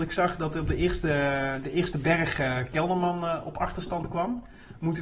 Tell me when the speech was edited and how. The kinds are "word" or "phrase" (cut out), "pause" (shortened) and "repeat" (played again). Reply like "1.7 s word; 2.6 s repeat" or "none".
none